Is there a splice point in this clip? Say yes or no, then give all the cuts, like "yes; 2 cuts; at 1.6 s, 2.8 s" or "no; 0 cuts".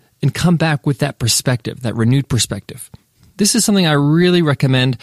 no; 0 cuts